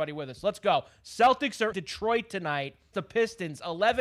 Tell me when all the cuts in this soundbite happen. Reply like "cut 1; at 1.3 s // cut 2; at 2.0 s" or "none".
cut 1; at 1.7 s // cut 2; at 2.9 s

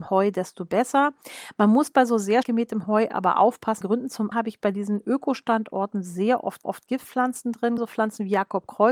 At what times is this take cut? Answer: cut 1; at 2.4 s // cut 2; at 3.8 s // cut 3; at 4.3 s // cut 4; at 6.6 s // cut 5; at 7.8 s

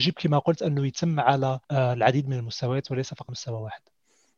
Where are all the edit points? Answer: cut 1; at 1.6 s // cut 2; at 3.3 s

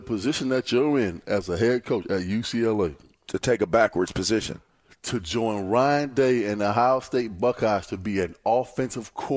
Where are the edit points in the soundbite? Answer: none

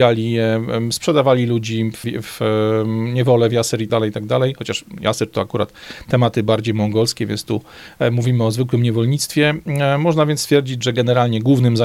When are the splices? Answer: cut 1; at 2.0 s // cut 2; at 3.9 s

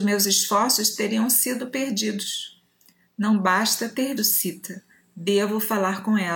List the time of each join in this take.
cut 1; at 4.2 s

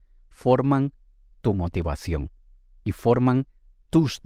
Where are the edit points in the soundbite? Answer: none

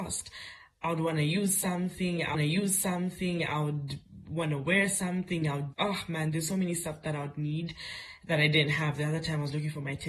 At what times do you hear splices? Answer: cut 1; at 2.3 s // cut 2; at 5.7 s

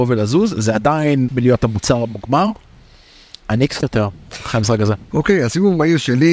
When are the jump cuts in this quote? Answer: cut 1; at 1.3 s // cut 2; at 3.4 s // cut 3; at 3.8 s

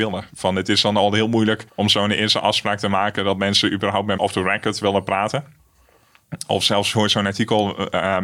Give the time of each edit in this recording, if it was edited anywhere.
cut 1; at 1.7 s // cut 2; at 4.2 s

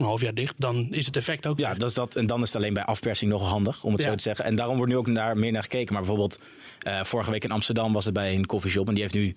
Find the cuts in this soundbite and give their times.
none

